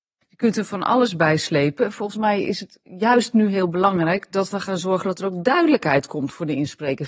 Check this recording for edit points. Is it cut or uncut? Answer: uncut